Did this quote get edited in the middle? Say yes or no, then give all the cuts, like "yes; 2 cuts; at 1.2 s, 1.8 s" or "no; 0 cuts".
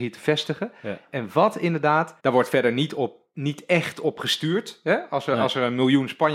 yes; 1 cut; at 2.2 s